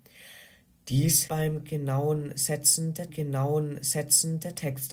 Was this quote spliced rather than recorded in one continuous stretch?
yes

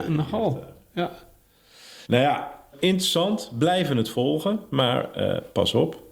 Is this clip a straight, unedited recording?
no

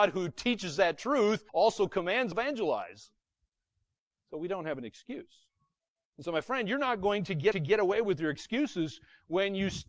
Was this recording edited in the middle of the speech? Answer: yes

